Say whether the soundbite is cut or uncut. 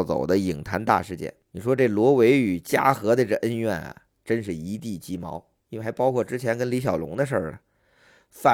cut